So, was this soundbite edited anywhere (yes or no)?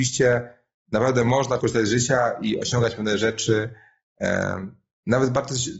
yes